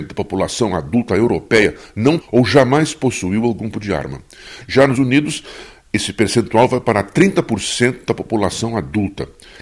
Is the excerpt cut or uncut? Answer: cut